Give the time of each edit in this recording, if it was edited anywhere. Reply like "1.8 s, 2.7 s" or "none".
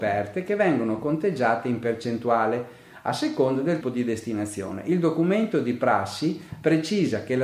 3.8 s